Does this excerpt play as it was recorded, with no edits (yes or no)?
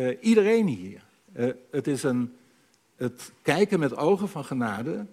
yes